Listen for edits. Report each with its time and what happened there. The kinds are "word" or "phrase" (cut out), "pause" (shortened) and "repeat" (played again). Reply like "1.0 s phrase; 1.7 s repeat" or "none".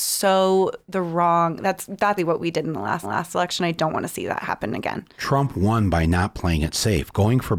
2.2 s word; 3.0 s repeat